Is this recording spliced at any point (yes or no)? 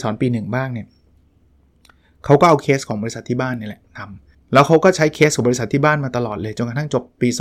yes